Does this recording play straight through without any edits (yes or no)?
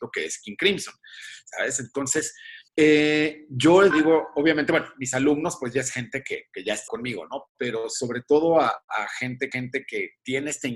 no